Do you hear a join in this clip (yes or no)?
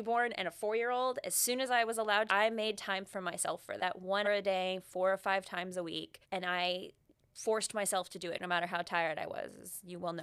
yes